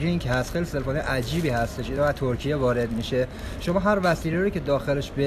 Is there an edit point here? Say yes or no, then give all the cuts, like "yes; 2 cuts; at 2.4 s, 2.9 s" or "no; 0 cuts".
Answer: no; 0 cuts